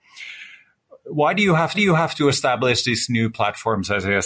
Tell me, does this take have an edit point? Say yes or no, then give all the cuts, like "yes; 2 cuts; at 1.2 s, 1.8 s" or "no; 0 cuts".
yes; 1 cut; at 1.7 s